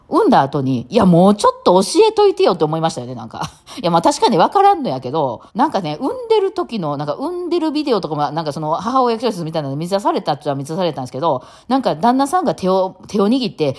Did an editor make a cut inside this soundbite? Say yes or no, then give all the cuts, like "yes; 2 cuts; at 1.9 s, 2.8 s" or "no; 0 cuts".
yes; 1 cut; at 5.5 s